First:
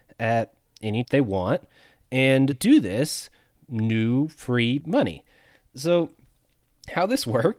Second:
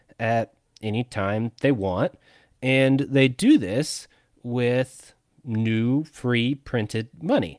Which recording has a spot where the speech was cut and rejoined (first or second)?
first